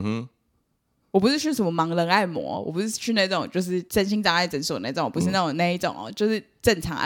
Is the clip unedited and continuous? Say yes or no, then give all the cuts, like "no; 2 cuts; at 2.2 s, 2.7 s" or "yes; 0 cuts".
no; 1 cut; at 3.9 s